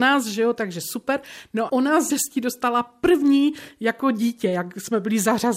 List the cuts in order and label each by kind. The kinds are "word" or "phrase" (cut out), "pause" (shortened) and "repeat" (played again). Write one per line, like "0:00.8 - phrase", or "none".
0:01.7 - word
0:02.1 - word